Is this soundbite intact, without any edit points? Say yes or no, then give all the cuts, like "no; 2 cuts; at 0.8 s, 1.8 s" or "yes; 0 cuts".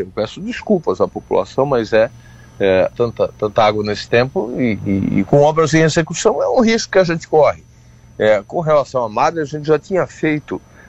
no; 1 cut; at 2.9 s